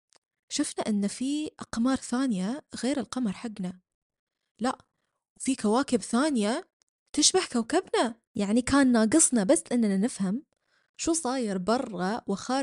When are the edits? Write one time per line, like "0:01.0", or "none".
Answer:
none

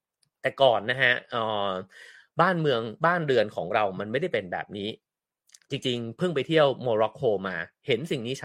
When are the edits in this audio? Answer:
none

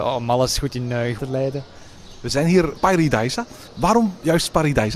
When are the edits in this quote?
0:01.2
0:02.7

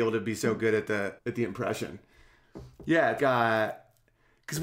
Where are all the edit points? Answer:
0:01.2
0:03.2

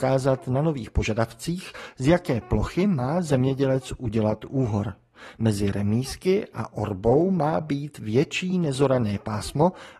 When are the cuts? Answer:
none

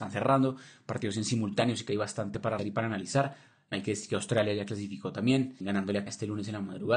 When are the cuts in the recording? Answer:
0:02.6
0:05.6
0:06.1

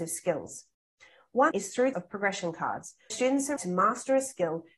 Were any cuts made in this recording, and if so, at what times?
0:01.5
0:01.9
0:03.1
0:03.6

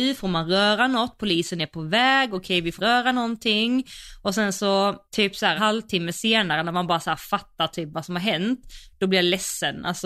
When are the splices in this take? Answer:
0:02.8
0:05.0
0:05.6

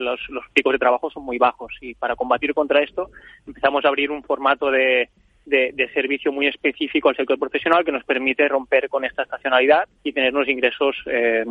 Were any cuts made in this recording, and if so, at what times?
0:10.0

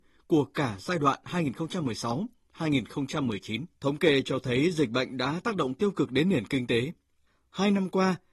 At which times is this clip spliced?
0:03.7

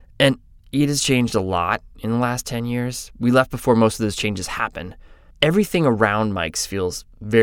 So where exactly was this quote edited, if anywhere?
0:05.3

